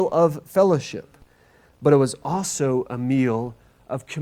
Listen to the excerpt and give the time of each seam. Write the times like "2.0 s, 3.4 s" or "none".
none